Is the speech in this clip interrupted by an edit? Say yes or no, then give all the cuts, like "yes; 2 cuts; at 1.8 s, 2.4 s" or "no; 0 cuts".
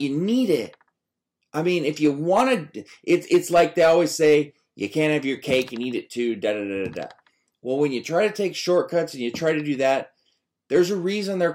no; 0 cuts